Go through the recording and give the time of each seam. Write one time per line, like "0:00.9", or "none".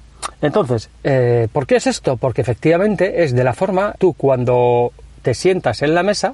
0:01.0
0:04.0